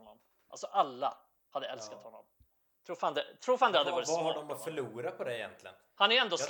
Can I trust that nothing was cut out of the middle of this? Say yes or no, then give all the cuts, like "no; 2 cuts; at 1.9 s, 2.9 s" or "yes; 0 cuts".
yes; 0 cuts